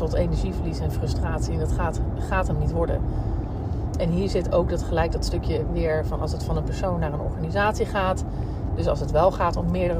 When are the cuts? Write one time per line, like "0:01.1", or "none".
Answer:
none